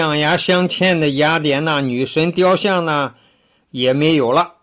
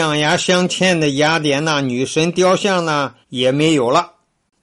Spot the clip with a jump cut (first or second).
second